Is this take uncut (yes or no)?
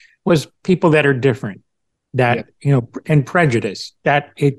yes